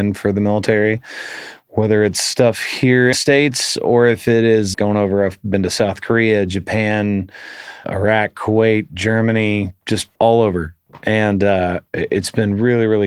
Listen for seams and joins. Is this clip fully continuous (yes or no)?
no